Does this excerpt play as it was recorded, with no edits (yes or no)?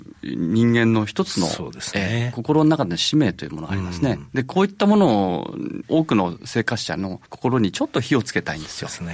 no